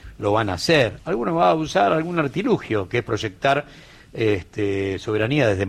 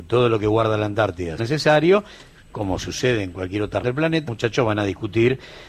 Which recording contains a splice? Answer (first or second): second